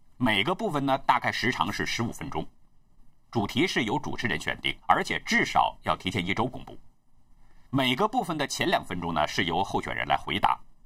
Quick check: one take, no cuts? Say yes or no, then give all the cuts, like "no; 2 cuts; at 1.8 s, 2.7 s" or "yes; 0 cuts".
no; 2 cuts; at 4.8 s, 7.7 s